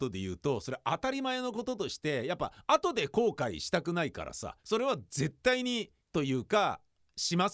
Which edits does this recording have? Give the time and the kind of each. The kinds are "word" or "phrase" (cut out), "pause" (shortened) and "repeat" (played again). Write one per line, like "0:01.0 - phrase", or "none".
0:04.6 - pause
0:06.0 - pause